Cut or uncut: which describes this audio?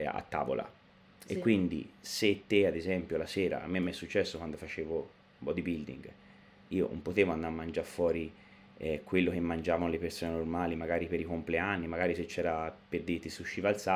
uncut